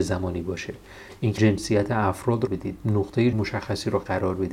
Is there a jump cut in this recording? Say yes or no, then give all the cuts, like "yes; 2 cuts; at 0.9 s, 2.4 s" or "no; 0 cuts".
yes; 3 cuts; at 1.4 s, 2.5 s, 3.3 s